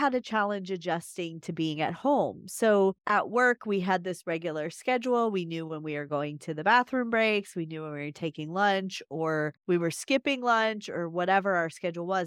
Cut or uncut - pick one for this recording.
cut